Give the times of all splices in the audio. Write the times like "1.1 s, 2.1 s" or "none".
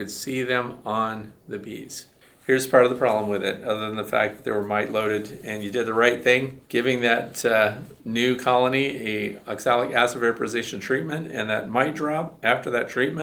1.4 s, 2.2 s, 6.6 s, 8.0 s